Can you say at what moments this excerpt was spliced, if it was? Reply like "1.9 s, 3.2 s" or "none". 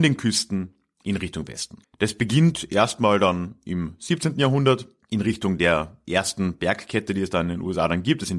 1.8 s, 5.0 s